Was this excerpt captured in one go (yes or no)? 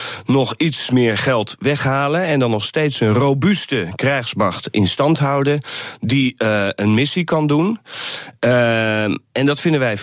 yes